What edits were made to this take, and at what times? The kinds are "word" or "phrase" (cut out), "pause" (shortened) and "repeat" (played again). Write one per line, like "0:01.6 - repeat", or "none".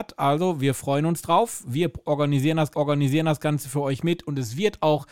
0:02.7 - repeat